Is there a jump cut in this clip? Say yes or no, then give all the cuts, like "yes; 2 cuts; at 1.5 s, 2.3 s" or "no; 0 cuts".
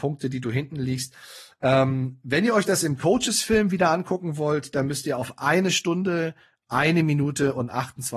no; 0 cuts